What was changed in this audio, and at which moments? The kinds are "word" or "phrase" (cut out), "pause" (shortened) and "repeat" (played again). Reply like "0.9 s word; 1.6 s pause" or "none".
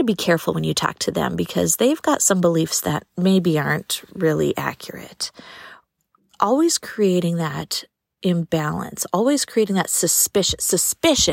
none